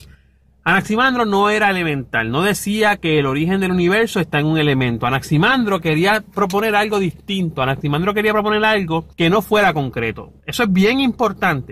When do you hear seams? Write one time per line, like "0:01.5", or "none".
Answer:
0:09.1